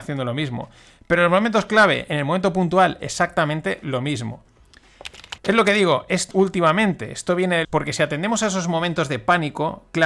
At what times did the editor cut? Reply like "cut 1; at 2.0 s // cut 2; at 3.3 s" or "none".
cut 1; at 5.4 s // cut 2; at 6.3 s // cut 3; at 7.6 s